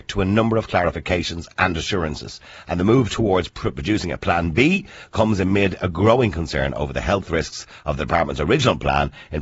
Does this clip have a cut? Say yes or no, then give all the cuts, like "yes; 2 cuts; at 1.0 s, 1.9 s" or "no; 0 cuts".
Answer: no; 0 cuts